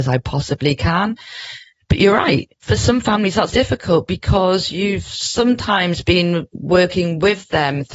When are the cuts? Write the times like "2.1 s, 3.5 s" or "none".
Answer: 3.5 s